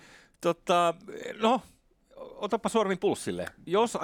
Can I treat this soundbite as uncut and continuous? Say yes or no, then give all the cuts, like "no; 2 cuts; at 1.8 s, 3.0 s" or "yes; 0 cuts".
yes; 0 cuts